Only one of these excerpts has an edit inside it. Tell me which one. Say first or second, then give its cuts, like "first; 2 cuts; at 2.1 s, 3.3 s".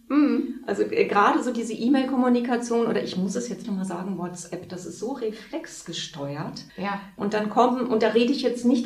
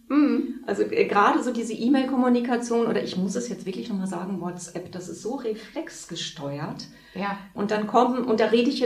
first; 2 cuts; at 3.6 s, 6.7 s